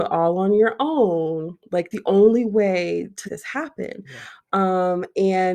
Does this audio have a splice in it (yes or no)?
yes